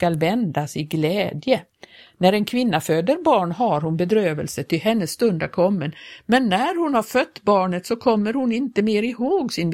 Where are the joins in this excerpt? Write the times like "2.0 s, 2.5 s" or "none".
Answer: none